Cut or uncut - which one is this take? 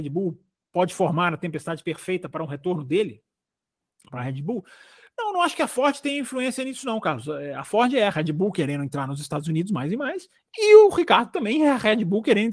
uncut